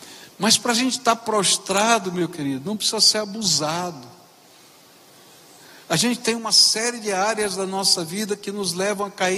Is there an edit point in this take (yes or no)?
no